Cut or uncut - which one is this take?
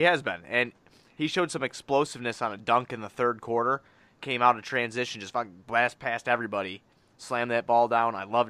uncut